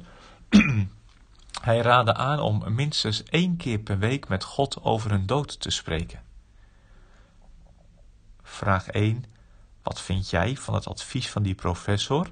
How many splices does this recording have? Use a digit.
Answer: 0